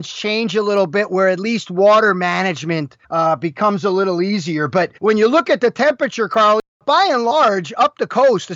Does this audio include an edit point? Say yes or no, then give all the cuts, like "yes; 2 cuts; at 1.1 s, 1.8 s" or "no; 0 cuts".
yes; 2 cuts; at 3.0 s, 5.0 s